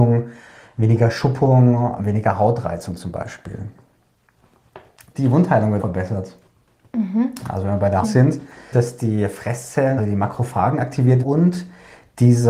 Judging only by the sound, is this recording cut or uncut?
cut